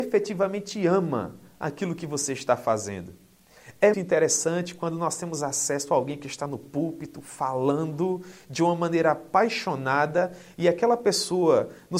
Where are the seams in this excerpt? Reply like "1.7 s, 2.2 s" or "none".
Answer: 3.9 s